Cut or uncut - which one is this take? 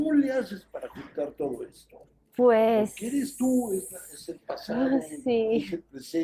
uncut